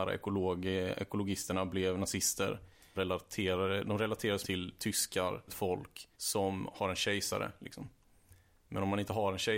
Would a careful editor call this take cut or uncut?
cut